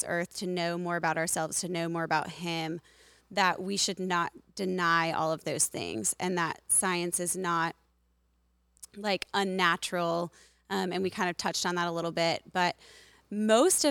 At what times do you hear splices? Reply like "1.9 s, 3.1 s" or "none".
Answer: none